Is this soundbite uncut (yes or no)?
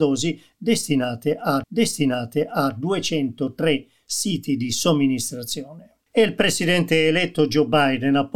no